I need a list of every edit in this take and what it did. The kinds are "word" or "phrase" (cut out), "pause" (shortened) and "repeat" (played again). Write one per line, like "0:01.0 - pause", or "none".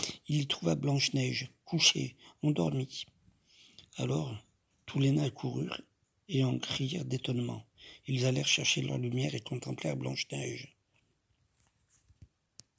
none